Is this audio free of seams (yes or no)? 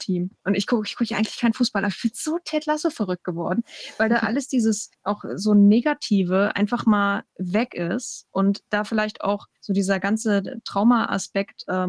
no